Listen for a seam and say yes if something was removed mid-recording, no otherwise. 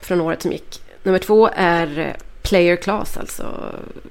no